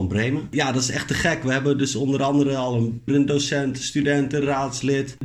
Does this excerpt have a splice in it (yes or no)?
yes